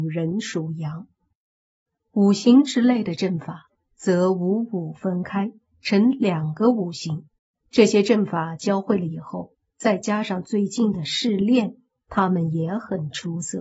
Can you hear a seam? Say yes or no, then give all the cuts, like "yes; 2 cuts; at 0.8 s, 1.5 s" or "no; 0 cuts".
yes; 1 cut; at 7.4 s